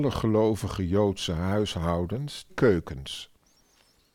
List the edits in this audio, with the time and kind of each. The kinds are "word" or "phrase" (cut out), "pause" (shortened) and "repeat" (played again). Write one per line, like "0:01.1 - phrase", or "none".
0:02.5 - word